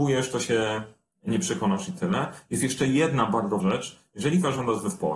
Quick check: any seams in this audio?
yes; 1 cut; at 3.6 s

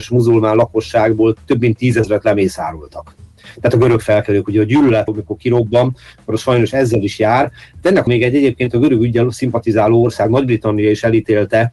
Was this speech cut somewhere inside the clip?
yes; 2 cuts; at 5.1 s, 8.1 s

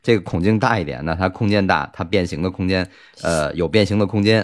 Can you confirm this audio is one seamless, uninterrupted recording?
yes; 0 cuts

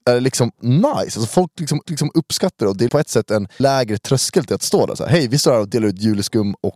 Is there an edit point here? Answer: yes; 3 cuts; at 1.8 s, 2.9 s, 3.6 s

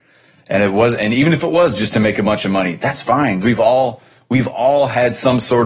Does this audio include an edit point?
yes; 1 cut; at 3.4 s

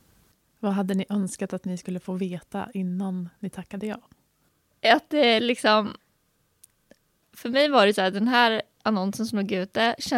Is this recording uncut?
yes; 0 cuts

